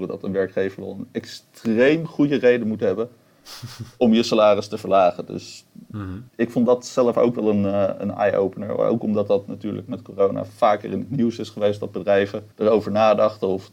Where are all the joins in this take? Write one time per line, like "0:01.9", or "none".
0:06.3
0:12.5